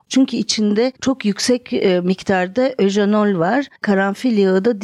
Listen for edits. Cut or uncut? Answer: cut